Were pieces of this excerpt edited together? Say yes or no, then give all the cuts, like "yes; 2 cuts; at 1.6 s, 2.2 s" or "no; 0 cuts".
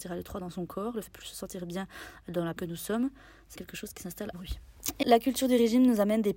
yes; 5 cuts; at 1.1 s, 2.6 s, 3.6 s, 4.3 s, 5.0 s